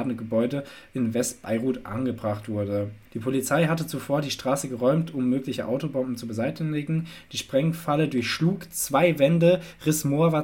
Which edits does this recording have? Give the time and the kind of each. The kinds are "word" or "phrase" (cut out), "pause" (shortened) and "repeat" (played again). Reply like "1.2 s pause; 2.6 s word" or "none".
3.1 s pause